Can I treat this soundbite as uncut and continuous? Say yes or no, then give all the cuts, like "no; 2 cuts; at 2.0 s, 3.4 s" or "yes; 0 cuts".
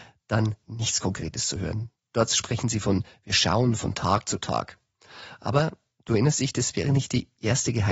yes; 0 cuts